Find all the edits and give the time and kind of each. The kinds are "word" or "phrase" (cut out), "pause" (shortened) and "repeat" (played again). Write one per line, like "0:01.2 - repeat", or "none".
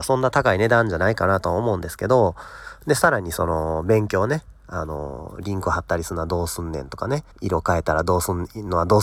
0:07.3 - pause